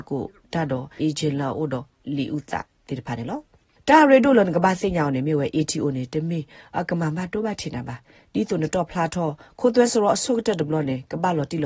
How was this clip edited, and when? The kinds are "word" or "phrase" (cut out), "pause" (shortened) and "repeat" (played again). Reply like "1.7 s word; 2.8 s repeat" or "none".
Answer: 1.0 s word